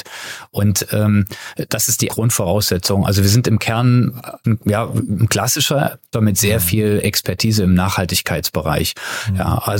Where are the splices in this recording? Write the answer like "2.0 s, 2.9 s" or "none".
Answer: 2.1 s, 4.4 s, 6.1 s